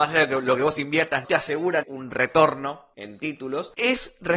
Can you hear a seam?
yes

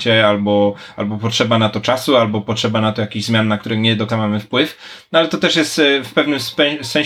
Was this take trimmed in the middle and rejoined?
yes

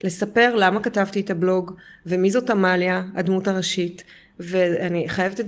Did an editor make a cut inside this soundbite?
no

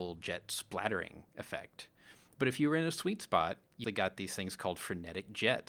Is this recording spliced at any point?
yes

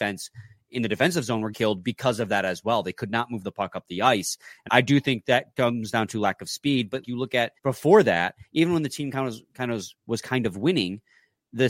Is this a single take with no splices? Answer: no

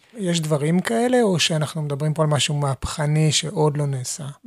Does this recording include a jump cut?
no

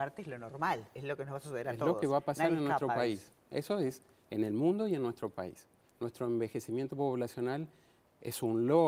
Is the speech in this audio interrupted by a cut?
no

